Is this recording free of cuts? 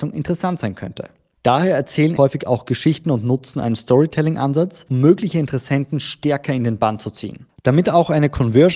no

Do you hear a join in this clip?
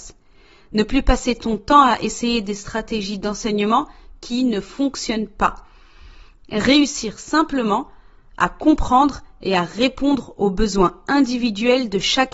no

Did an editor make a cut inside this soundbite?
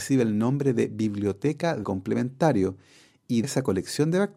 yes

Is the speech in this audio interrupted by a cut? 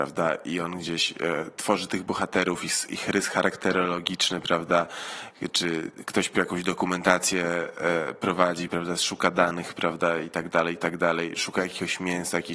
no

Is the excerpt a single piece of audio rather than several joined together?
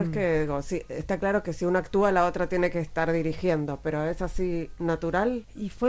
yes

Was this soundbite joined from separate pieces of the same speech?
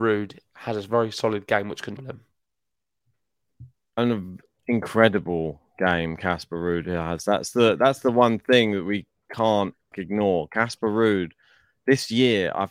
yes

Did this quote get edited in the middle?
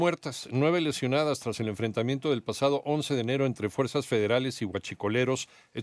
no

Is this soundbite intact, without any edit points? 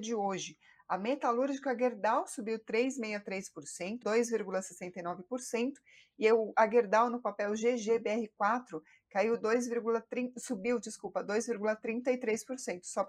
no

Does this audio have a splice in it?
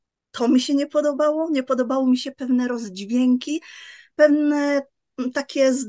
no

